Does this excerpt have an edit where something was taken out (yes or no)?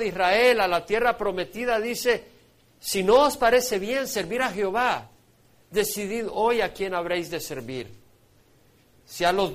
no